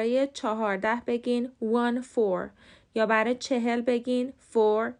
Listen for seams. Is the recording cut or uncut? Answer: uncut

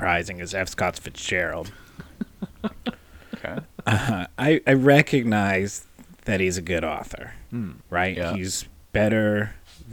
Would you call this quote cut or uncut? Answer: cut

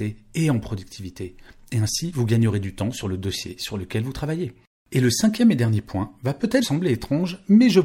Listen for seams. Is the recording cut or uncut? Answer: cut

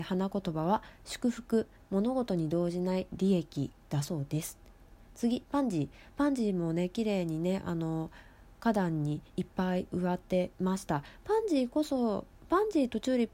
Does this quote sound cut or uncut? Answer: uncut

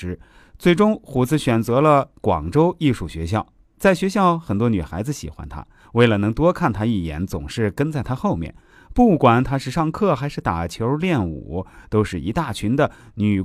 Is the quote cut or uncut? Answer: uncut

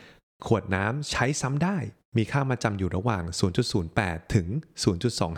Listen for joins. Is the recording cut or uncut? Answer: uncut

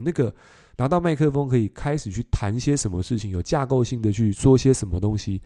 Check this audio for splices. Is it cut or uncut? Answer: uncut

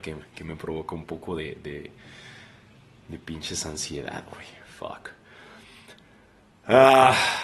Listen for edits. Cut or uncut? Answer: uncut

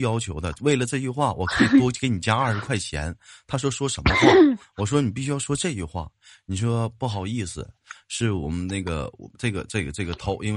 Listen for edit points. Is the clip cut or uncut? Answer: uncut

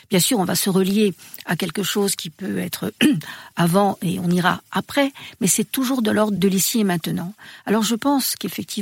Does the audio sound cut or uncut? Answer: cut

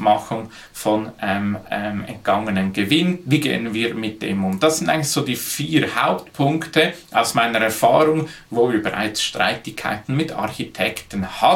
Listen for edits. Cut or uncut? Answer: uncut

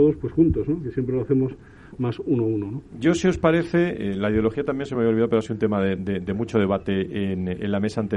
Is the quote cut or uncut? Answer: uncut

